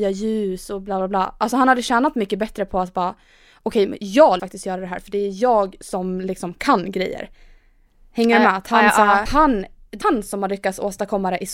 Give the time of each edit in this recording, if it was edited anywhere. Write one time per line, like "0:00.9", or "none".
0:04.4
0:09.3
0:10.0

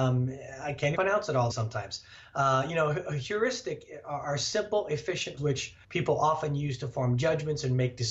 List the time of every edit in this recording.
0:00.9
0:01.5
0:05.4
0:05.8

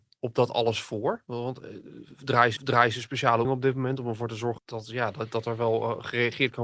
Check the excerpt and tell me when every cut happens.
0:02.6
0:03.4
0:04.6

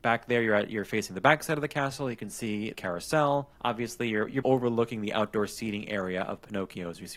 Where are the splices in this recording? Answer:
0:02.7
0:03.5
0:04.4

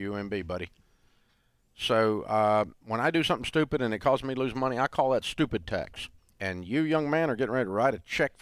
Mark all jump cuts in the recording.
0:06.2

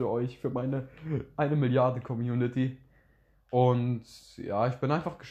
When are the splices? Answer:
none

